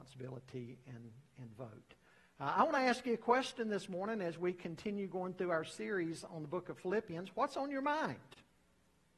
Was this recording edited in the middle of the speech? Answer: no; 0 cuts

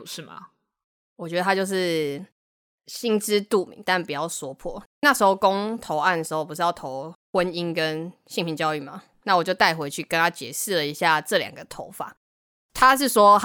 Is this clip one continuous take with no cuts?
yes; 0 cuts

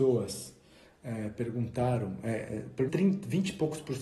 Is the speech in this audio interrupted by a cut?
yes; 1 cut; at 2.9 s

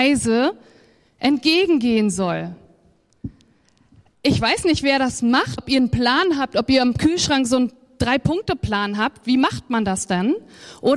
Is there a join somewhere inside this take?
yes; 1 cut; at 5.6 s

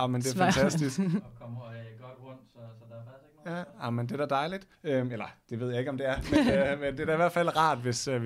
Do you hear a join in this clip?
yes; 1 cut; at 4.7 s

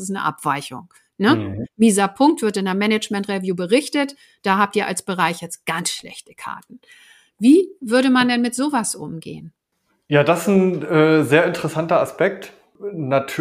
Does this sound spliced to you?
no; 0 cuts

